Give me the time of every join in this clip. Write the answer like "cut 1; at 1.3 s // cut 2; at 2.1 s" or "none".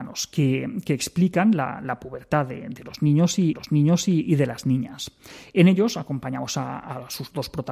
cut 1; at 3.5 s